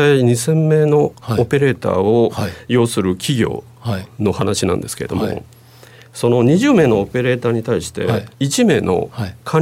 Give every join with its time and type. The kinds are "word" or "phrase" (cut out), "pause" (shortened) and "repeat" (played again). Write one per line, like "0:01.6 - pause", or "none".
0:08.3 - pause